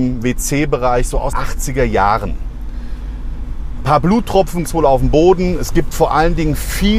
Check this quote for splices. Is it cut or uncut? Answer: cut